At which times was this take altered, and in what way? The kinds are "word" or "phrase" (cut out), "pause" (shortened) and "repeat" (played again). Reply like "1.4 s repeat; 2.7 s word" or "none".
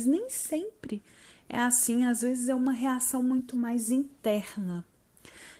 none